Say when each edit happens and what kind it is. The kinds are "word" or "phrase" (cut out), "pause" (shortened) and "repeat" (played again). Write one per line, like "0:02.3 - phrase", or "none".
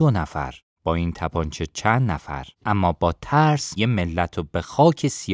0:02.5 - pause
0:03.8 - word

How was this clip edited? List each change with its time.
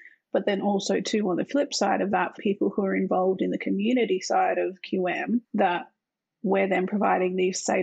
0:02.4 - phrase
0:05.4 - pause

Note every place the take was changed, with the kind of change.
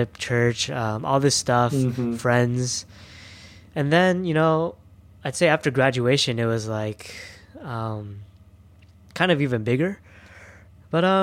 none

